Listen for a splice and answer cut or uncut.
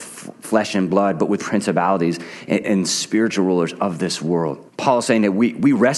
cut